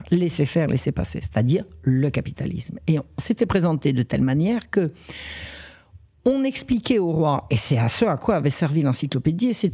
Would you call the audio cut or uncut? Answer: uncut